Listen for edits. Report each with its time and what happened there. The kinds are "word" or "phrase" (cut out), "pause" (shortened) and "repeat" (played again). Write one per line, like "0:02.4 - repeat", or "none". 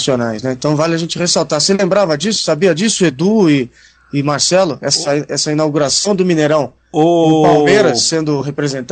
none